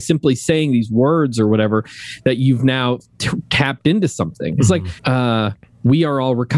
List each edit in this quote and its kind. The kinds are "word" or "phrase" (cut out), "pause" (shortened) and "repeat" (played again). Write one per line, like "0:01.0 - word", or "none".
0:05.0 - pause